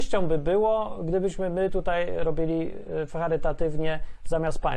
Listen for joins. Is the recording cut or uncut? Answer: uncut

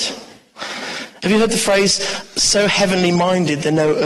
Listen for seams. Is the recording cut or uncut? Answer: uncut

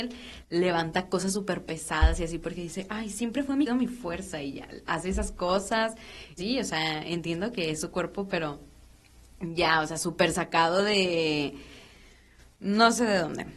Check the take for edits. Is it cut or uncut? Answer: cut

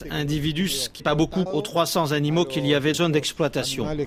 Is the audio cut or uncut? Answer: cut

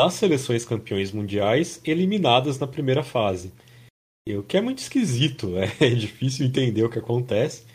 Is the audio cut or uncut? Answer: uncut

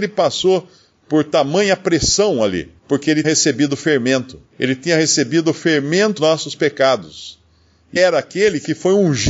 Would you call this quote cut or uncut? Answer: cut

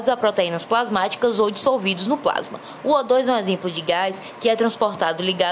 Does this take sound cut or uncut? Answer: uncut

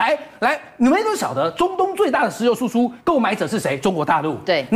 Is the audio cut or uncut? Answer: cut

